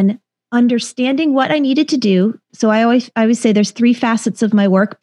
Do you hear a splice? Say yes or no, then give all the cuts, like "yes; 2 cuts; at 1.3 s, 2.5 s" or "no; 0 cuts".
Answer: yes; 1 cut; at 2.4 s